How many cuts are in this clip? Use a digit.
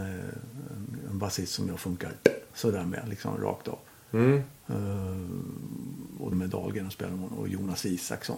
1